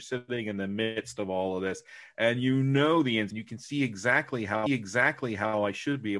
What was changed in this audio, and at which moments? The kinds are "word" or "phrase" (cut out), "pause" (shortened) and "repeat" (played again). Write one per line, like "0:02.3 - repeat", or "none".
0:03.3 - phrase
0:04.7 - repeat